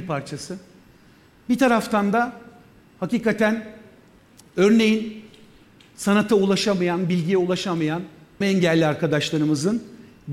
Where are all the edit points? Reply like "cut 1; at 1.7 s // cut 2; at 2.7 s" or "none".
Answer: cut 1; at 8.4 s